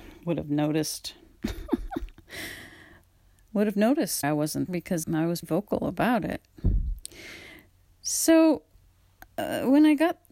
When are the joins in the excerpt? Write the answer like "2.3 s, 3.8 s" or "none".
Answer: 4.2 s, 4.7 s, 5.0 s, 5.4 s, 9.3 s

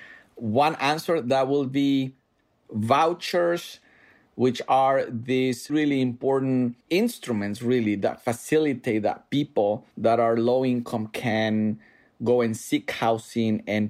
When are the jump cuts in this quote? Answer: 2.6 s, 5.7 s, 6.8 s, 9.9 s

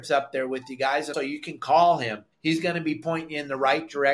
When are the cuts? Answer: 1.1 s, 2.3 s

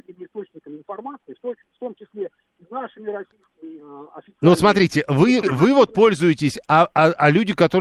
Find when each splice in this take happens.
5.4 s

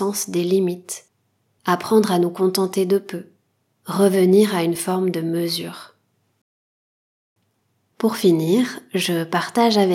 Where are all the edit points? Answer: none

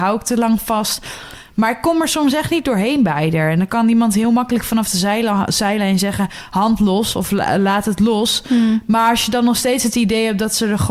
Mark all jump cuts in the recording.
none

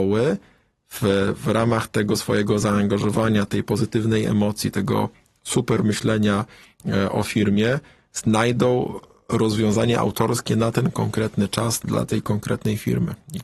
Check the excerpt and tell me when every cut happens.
none

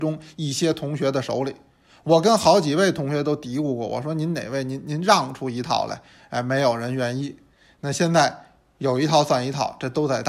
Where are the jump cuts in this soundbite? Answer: none

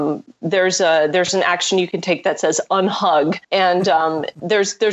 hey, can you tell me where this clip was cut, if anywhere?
3.4 s

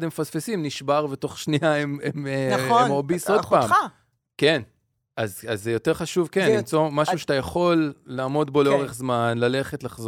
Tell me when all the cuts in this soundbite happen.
4.9 s

